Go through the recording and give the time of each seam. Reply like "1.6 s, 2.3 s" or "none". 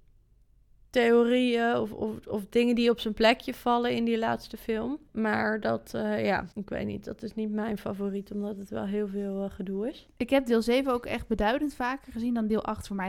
5.1 s, 6.5 s

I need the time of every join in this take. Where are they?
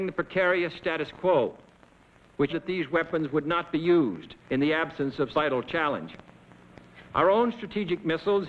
2.5 s, 4.4 s, 5.3 s, 7.0 s

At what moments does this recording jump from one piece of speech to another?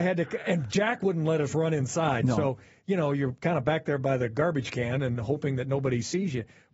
none

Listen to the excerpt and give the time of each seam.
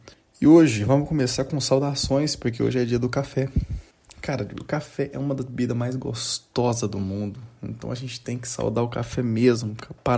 none

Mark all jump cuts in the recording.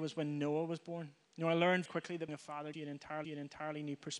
1.2 s, 1.9 s, 2.3 s, 2.7 s, 3.2 s

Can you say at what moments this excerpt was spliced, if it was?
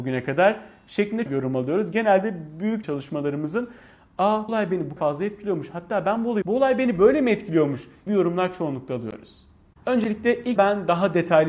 1.3 s, 2.8 s, 4.5 s, 5.0 s, 6.4 s, 8.1 s, 10.6 s

